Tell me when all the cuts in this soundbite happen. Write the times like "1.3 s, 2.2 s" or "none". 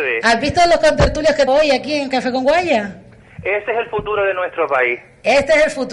1.5 s